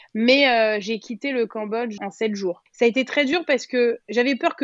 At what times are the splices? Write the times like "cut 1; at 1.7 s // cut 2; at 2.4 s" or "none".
cut 1; at 2.0 s